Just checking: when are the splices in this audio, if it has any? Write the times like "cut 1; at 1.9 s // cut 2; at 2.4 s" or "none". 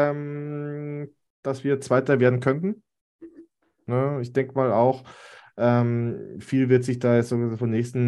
none